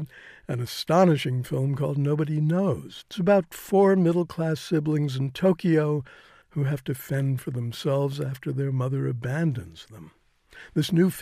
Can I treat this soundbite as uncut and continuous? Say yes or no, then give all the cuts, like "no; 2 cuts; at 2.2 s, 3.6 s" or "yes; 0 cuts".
yes; 0 cuts